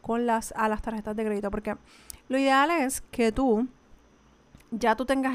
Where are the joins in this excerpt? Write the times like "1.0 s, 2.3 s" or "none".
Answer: none